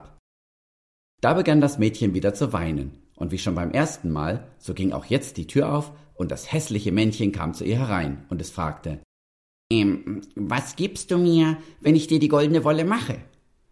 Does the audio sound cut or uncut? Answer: uncut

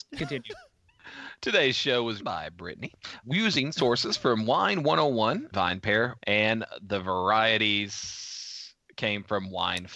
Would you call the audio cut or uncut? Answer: cut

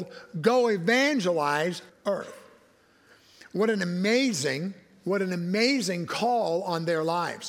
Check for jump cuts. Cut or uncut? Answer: cut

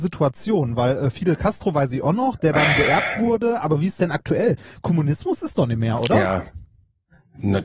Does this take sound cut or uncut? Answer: uncut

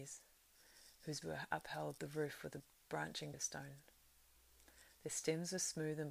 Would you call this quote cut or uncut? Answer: cut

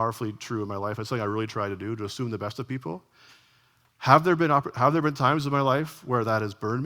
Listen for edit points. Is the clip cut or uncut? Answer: uncut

